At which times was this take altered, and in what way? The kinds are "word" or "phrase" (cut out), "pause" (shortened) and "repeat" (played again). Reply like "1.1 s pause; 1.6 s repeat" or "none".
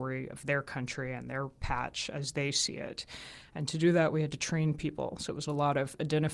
none